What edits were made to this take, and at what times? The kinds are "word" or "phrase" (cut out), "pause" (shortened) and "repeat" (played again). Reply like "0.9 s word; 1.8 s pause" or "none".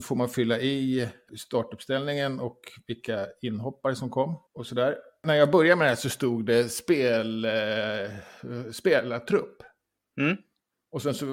4.5 s pause